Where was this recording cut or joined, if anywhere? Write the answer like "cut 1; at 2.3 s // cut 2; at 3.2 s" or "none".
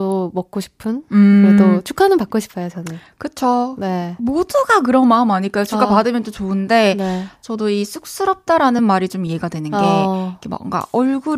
none